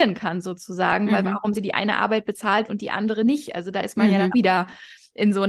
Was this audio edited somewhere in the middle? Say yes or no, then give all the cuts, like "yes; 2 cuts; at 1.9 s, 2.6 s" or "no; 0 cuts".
yes; 3 cuts; at 1.5 s, 2.7 s, 4.3 s